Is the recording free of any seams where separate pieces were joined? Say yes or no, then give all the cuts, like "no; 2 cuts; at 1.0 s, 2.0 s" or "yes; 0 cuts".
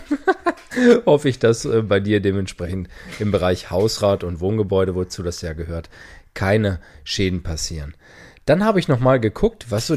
yes; 0 cuts